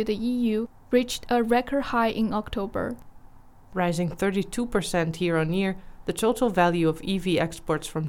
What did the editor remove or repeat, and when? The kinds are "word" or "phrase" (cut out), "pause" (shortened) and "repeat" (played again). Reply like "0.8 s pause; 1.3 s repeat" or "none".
none